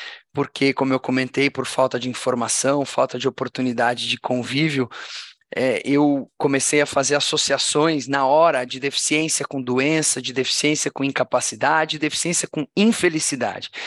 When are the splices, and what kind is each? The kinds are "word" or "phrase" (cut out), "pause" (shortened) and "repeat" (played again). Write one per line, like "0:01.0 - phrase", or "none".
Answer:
none

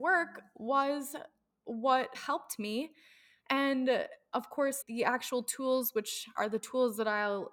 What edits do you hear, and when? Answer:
0:02.1 - word
0:04.8 - word

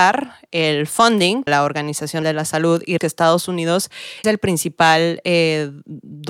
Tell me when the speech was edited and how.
0:01.5 - word
0:02.2 - word
0:03.0 - word
0:04.2 - word

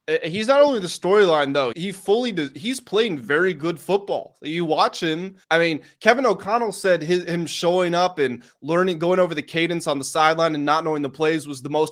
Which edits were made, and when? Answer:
0:01.7 - word
0:05.4 - pause

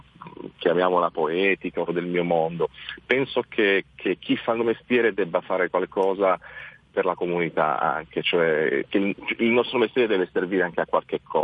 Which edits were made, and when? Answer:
0:01.9 - word
0:04.6 - word

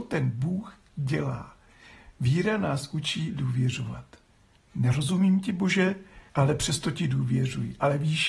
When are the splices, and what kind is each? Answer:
0:06.3 - pause

